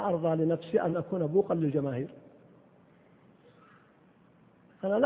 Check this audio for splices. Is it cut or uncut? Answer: uncut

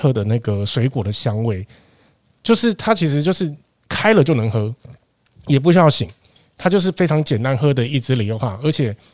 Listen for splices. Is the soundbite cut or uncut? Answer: uncut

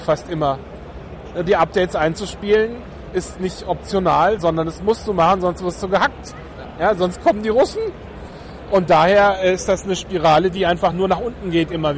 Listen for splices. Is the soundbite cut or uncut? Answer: uncut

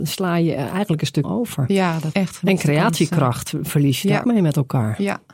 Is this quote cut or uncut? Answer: cut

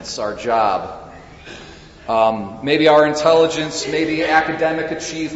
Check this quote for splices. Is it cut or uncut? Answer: uncut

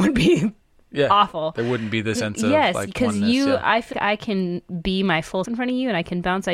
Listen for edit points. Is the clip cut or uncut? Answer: cut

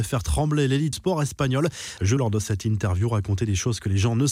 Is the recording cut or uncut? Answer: cut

